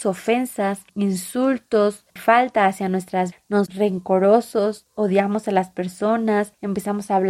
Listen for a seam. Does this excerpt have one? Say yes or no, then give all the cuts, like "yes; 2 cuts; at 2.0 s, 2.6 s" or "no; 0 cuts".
yes; 2 cuts; at 3.3 s, 3.7 s